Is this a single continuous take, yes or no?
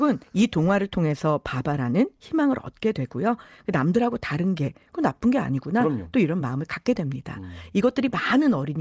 yes